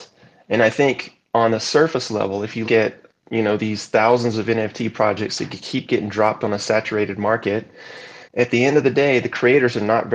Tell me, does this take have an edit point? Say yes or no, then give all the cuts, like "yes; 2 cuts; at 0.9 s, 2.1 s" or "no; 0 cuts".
yes; 2 cuts; at 2.6 s, 8.2 s